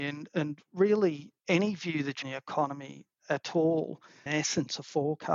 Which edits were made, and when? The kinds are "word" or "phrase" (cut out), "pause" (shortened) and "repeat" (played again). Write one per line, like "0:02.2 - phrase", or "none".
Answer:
0:01.4 - pause
0:02.2 - phrase
0:04.3 - phrase